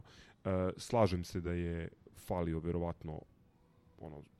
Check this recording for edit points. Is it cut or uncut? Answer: uncut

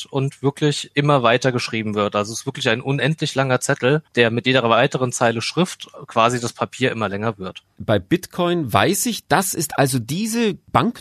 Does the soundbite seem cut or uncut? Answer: uncut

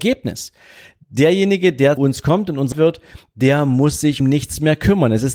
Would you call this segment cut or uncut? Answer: cut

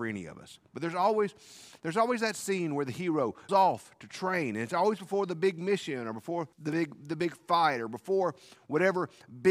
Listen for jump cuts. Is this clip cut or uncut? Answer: cut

